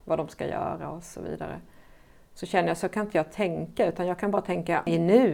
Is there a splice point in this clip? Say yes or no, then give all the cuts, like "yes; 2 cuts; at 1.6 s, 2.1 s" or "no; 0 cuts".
no; 0 cuts